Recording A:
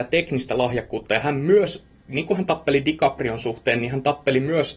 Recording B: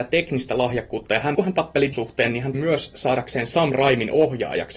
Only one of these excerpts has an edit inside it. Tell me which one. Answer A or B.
B